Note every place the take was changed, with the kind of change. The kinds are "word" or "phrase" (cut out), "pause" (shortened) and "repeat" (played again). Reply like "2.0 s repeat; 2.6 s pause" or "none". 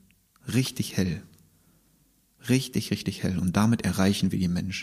none